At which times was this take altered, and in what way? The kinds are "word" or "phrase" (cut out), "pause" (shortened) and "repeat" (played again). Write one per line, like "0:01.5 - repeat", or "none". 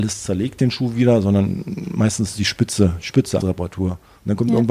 0:03.4 - phrase